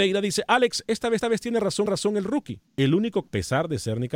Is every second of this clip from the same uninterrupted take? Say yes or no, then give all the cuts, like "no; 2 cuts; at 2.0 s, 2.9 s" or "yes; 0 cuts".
no; 4 cuts; at 1.2 s, 1.9 s, 2.7 s, 3.3 s